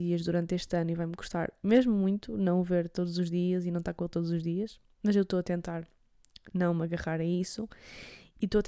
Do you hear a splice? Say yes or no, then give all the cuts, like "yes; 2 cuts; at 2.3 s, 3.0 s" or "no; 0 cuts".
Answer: no; 0 cuts